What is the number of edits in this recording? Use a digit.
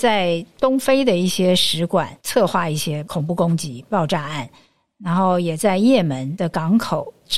0